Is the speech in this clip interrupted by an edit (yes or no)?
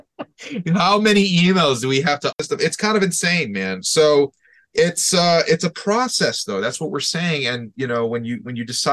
no